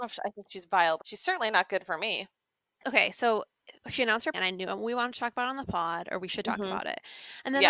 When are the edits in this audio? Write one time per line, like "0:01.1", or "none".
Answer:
0:01.0
0:03.8
0:04.3